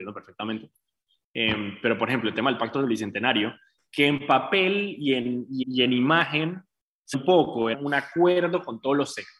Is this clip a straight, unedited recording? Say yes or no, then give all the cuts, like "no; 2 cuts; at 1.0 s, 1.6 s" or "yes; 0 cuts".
no; 3 cuts; at 5.6 s, 7.1 s, 7.7 s